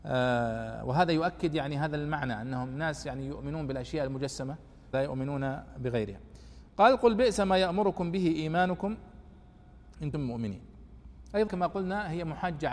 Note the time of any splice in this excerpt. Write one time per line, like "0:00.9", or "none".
0:04.9
0:10.1
0:11.5